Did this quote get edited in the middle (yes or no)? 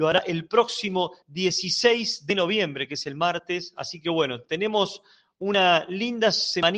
no